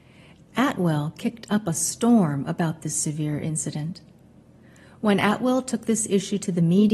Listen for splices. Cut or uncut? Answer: uncut